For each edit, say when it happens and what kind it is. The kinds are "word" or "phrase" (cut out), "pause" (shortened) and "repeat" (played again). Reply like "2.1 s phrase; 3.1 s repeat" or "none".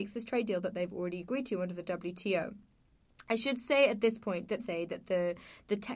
4.6 s phrase